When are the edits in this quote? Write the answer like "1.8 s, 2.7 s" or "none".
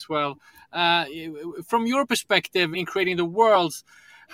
2.7 s